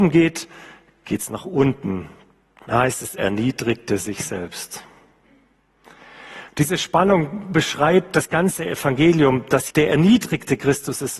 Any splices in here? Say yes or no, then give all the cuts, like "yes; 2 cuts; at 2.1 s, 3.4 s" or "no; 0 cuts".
yes; 2 cuts; at 3.2 s, 9.7 s